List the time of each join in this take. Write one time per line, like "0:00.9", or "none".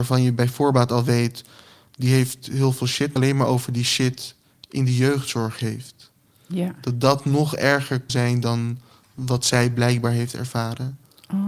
0:03.2
0:08.1